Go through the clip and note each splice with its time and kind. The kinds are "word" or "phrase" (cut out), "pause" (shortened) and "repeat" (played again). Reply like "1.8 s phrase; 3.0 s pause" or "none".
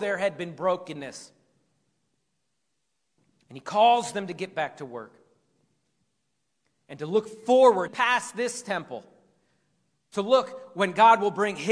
7.9 s word